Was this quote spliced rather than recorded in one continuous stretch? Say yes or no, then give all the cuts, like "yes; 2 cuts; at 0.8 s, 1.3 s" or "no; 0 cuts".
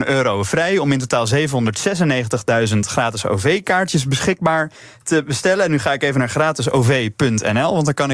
no; 0 cuts